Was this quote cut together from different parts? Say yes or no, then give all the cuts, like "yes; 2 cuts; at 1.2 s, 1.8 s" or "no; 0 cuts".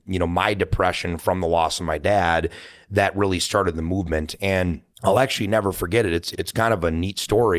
yes; 2 cuts; at 4.9 s, 6.3 s